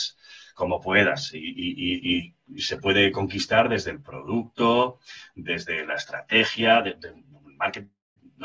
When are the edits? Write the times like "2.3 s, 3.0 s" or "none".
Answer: none